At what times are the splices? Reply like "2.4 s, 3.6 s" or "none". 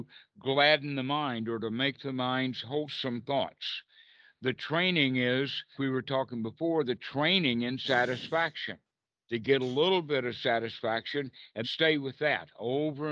5.7 s, 11.6 s